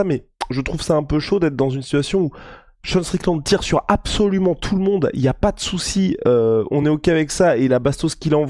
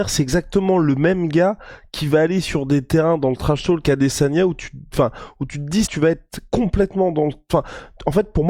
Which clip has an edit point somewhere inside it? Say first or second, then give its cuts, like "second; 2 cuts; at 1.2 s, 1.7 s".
second; 2 cuts; at 3.8 s, 5.8 s